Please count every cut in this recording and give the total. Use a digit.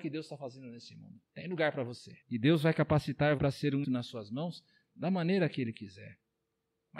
4